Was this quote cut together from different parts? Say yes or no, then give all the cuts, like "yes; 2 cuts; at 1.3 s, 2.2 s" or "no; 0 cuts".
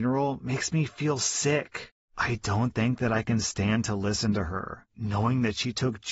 no; 0 cuts